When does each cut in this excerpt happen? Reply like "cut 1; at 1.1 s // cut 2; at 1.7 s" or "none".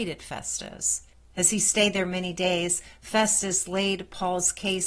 cut 1; at 1.1 s